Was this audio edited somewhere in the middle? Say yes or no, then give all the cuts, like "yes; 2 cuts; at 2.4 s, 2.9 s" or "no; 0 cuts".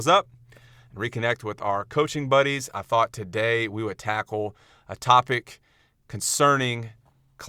no; 0 cuts